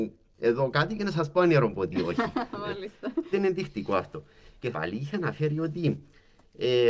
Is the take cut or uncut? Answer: cut